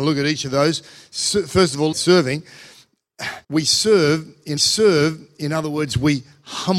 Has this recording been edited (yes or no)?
yes